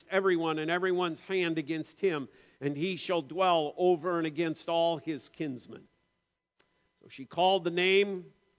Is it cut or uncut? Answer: uncut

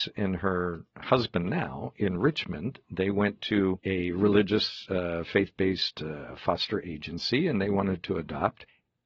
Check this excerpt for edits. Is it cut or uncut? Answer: uncut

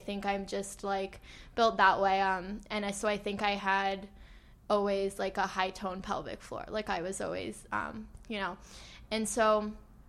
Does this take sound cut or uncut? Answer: uncut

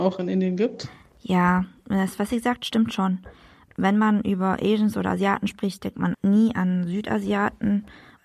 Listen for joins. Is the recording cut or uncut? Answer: cut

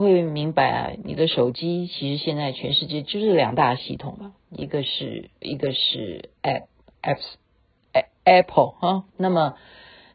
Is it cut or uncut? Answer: cut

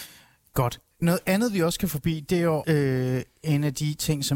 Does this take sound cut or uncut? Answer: cut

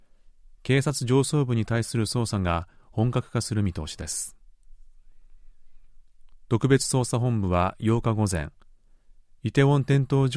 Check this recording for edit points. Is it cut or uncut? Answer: uncut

